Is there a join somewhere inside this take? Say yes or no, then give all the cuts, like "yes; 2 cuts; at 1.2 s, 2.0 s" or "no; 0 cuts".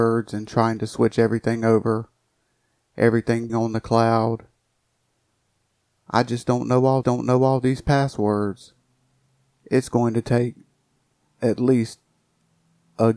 yes; 2 cuts; at 3.5 s, 7.0 s